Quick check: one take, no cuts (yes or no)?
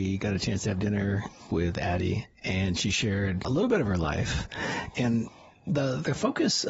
yes